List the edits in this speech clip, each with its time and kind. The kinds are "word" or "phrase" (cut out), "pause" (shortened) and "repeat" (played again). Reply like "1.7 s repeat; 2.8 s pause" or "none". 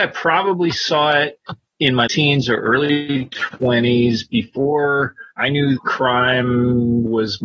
2.1 s word; 5.3 s pause; 5.8 s word